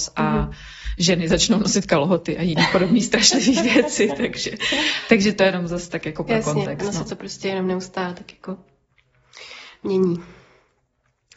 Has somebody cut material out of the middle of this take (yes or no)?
no